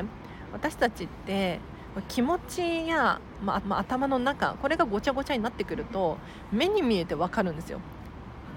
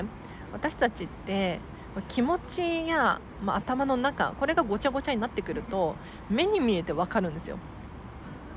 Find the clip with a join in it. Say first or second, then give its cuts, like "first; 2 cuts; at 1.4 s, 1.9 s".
first; 1 cut; at 3.6 s